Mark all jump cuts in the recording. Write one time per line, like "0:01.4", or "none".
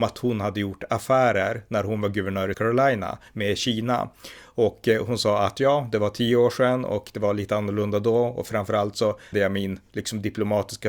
0:02.5
0:09.3